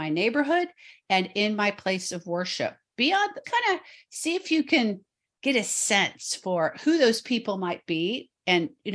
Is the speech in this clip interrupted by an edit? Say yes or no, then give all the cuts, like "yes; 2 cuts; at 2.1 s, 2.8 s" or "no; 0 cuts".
yes; 1 cut; at 3.4 s